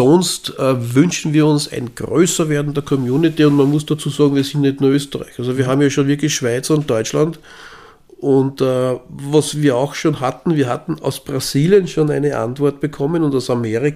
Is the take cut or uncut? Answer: uncut